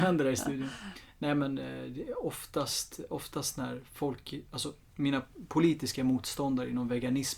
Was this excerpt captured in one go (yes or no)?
yes